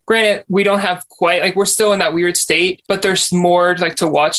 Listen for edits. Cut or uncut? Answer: uncut